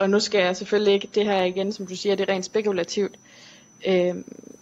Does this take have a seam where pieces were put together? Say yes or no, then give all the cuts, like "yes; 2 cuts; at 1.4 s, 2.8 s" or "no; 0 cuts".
no; 0 cuts